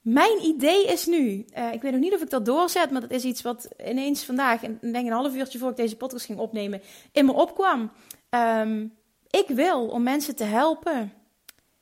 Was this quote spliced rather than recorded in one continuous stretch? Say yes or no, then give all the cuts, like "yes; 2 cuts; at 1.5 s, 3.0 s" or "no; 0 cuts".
no; 0 cuts